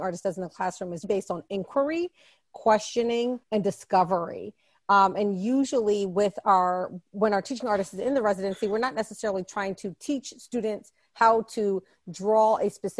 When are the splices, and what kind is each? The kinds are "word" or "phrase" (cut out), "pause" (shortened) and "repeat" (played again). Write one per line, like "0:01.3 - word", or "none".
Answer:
0:01.0 - word
0:03.4 - pause